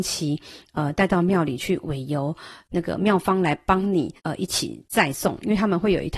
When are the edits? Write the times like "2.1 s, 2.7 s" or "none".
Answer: 4.2 s